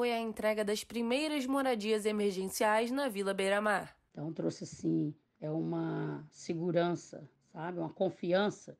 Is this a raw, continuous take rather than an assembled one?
yes; 0 cuts

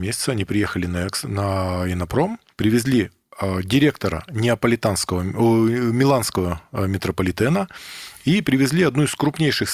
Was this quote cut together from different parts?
no; 0 cuts

